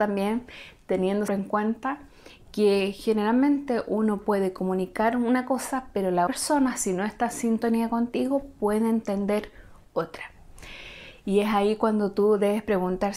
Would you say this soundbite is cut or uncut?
cut